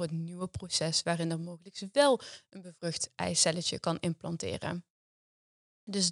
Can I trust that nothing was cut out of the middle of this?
yes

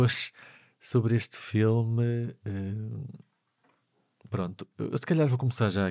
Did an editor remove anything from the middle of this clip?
no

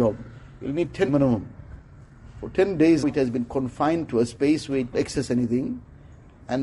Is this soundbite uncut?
no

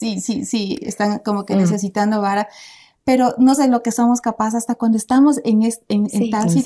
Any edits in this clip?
yes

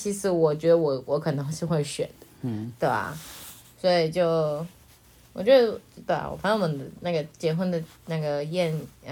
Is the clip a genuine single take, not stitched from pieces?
yes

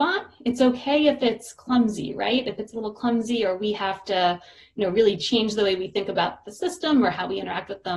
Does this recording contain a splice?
no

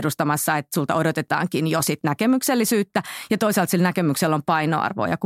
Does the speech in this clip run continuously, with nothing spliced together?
yes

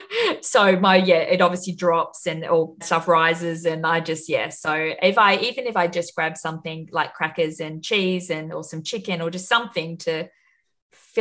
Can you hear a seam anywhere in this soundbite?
yes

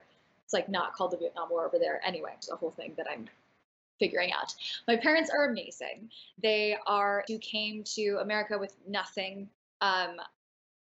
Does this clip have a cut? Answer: yes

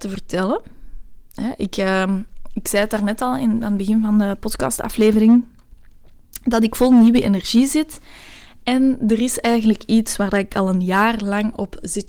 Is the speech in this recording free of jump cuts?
yes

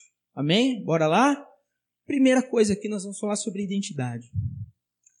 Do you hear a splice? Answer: no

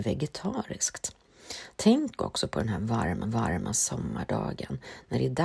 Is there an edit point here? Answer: yes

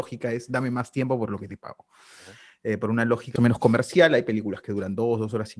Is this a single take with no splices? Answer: no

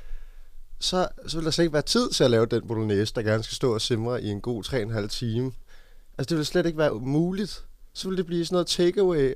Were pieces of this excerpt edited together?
no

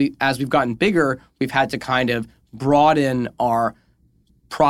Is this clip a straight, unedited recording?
yes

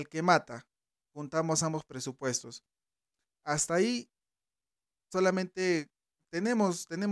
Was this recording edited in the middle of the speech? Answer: no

